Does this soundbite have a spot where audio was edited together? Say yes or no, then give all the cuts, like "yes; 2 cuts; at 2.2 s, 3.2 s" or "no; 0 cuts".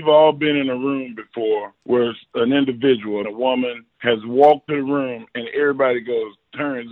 yes; 5 cuts; at 1.8 s, 2.3 s, 3.2 s, 3.9 s, 4.7 s